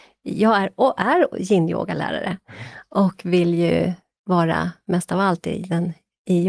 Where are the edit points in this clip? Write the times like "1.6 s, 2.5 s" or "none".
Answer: none